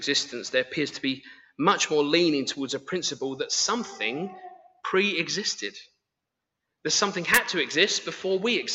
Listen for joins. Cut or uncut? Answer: uncut